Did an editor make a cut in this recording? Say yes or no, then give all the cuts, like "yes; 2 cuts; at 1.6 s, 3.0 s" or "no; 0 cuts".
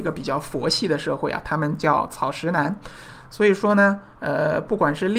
no; 0 cuts